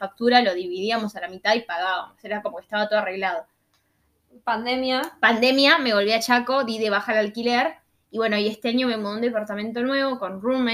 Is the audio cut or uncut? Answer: uncut